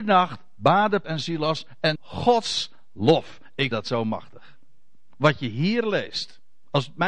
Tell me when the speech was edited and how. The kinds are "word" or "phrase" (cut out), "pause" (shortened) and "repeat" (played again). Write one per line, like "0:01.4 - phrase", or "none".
0:01.0 - word
0:01.9 - word
0:03.7 - word